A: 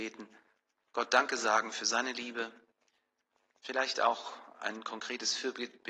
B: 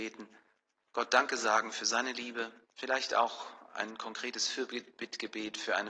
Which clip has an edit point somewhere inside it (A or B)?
B